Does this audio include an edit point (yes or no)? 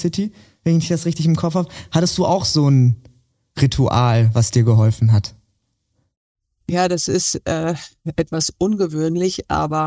no